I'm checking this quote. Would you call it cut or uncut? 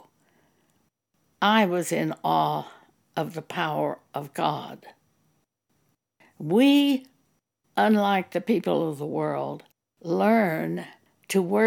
uncut